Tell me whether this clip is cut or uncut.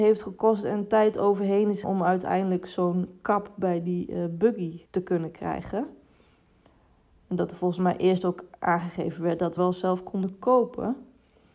cut